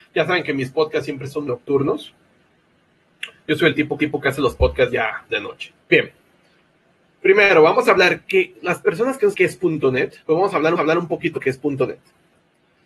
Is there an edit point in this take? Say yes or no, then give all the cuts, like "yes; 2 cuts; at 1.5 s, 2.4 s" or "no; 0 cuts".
yes; 8 cuts; at 1.5 s, 4.0 s, 5.8 s, 8.3 s, 9.3 s, 10.2 s, 10.8 s, 11.3 s